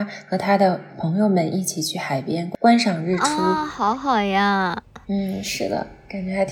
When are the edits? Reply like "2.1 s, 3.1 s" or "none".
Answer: 5.0 s